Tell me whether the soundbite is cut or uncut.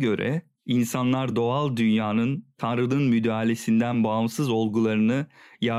uncut